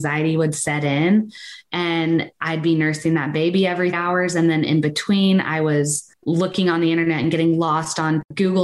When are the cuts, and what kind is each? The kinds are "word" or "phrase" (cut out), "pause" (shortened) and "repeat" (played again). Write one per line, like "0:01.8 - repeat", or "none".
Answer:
0:03.9 - word
0:06.1 - pause